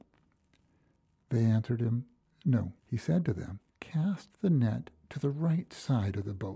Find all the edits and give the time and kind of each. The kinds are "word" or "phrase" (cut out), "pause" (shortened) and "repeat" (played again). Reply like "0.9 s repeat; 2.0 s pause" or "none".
2.8 s pause; 3.7 s pause